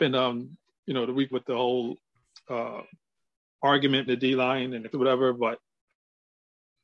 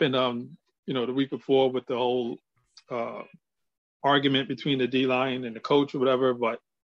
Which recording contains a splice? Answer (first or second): first